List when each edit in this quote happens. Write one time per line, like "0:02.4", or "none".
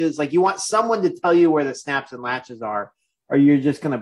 none